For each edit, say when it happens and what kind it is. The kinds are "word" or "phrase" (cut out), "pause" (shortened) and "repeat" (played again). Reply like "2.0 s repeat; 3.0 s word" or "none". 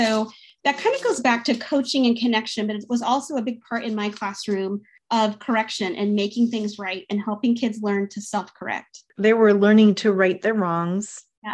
none